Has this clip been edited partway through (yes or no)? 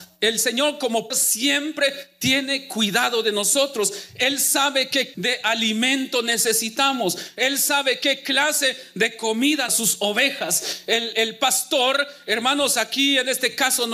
yes